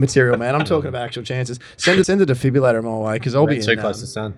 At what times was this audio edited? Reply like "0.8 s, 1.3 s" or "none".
2.0 s